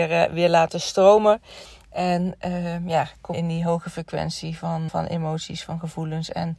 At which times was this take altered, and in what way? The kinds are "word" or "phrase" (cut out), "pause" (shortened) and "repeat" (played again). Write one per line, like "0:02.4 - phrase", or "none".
0:03.3 - word
0:04.9 - word